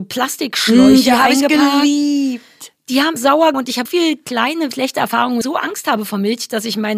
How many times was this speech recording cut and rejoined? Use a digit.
5